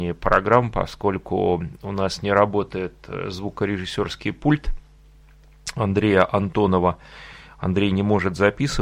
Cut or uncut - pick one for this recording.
uncut